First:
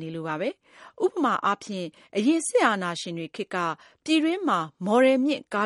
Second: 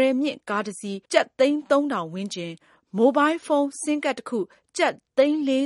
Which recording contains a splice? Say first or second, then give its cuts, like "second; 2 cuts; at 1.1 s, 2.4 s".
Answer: second; 1 cut; at 1.0 s